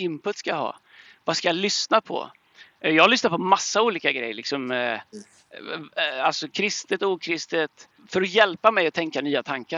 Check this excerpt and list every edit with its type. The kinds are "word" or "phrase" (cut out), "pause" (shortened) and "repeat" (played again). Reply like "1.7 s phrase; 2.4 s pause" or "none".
8.0 s word